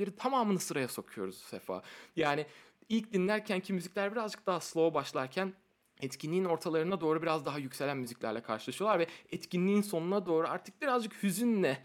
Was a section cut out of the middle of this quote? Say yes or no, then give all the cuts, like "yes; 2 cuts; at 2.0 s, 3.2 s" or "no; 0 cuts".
no; 0 cuts